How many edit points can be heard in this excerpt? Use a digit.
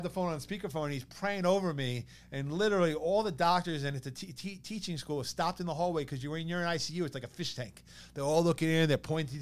0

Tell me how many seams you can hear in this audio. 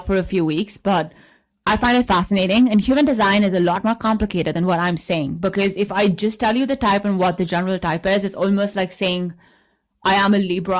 0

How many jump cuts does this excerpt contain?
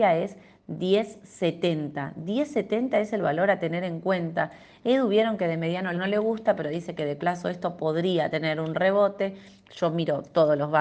2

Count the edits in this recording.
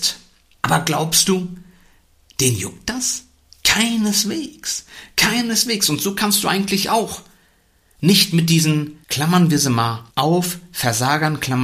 2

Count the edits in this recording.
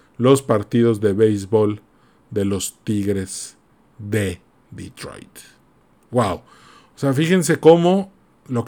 0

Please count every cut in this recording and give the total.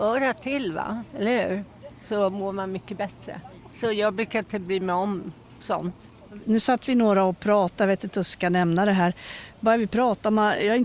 0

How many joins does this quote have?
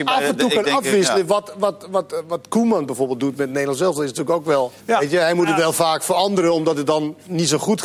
1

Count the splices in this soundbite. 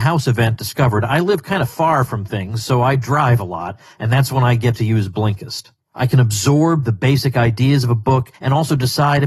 1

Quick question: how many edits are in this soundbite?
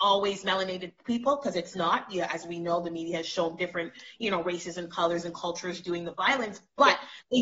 0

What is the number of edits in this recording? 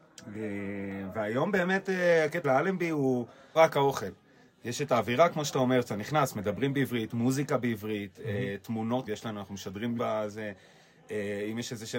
4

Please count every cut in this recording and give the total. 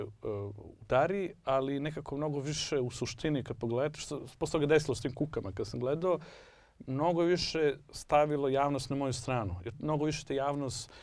1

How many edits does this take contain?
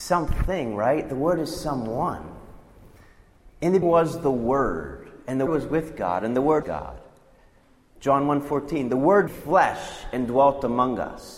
4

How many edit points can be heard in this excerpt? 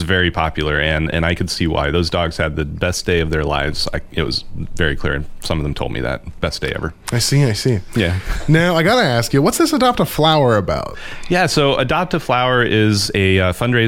0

